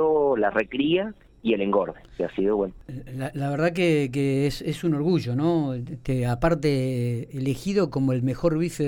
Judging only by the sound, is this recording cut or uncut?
uncut